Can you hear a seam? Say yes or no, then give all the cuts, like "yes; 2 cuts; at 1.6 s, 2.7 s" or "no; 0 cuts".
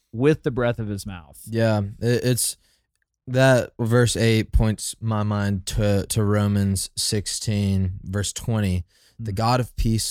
yes; 1 cut; at 8.0 s